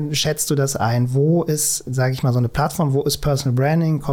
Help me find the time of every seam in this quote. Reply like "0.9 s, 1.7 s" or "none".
none